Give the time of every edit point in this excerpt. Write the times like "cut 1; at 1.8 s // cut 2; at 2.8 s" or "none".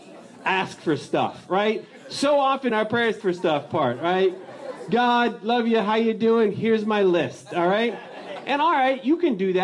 cut 1; at 2.7 s // cut 2; at 3.2 s